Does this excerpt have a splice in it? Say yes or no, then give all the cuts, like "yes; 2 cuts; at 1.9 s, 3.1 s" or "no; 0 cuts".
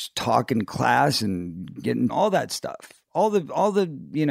yes; 1 cut; at 2.1 s